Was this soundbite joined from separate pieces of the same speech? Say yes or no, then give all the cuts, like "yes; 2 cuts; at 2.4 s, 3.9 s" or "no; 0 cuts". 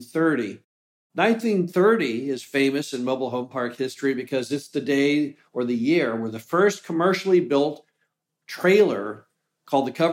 no; 0 cuts